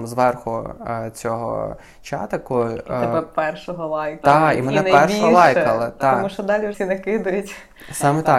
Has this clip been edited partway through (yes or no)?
yes